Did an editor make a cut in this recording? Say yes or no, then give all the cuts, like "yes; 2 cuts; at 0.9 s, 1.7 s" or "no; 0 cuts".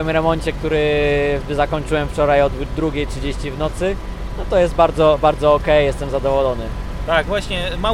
no; 0 cuts